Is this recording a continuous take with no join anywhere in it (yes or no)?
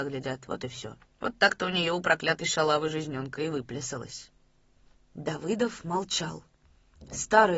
no